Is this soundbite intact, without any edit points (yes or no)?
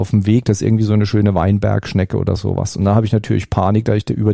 yes